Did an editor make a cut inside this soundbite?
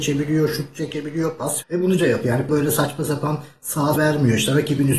yes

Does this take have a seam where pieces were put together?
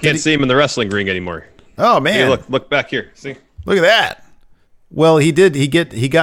no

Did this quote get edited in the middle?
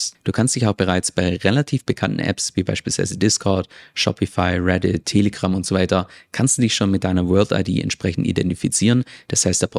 no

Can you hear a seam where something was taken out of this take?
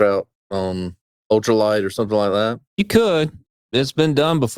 no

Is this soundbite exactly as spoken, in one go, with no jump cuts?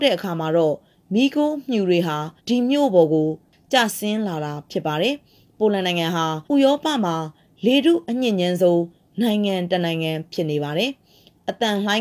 no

